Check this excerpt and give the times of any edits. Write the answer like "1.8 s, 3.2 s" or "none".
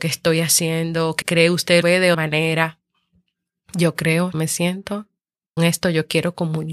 1.2 s, 1.8 s, 2.1 s, 4.3 s, 5.6 s